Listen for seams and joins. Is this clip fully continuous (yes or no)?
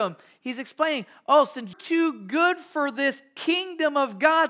no